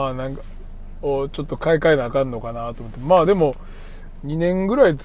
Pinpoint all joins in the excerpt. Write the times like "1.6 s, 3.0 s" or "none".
none

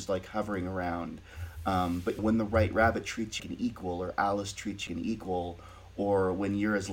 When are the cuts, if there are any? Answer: 2.2 s, 3.4 s, 4.9 s

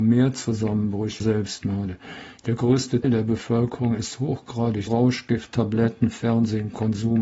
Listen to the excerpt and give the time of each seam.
1.2 s, 3.0 s, 4.9 s

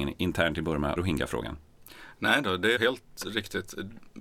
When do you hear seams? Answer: 1.0 s, 2.8 s

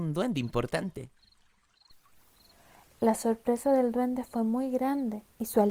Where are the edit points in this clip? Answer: none

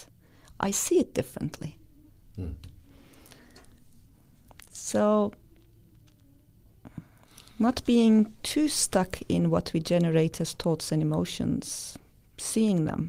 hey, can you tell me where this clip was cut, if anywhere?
2.1 s

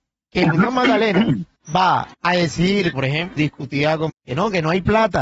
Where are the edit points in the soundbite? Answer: 2.1 s, 2.9 s, 3.4 s, 4.1 s

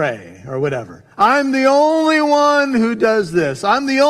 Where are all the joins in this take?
1.1 s

